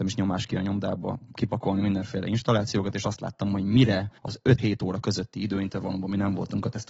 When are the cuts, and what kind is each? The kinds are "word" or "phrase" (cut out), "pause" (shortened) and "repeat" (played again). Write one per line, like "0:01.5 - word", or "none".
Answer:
0:04.2 - pause
0:04.6 - word